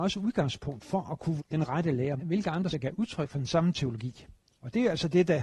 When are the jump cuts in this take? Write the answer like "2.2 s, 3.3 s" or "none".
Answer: 1.4 s, 2.2 s, 2.7 s